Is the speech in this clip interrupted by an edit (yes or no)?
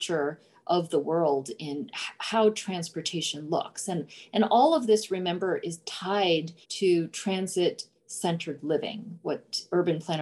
yes